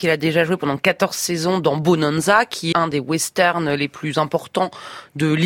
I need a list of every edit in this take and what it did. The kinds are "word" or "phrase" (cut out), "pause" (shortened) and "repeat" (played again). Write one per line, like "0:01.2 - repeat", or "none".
0:02.7 - word